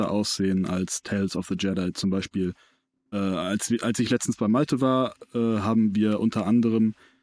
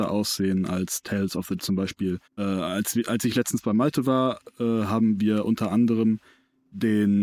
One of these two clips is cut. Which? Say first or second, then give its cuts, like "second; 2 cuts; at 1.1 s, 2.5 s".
second; 2 cuts; at 1.6 s, 2.3 s